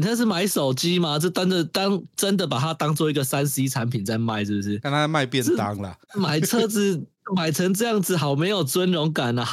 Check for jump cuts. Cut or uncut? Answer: uncut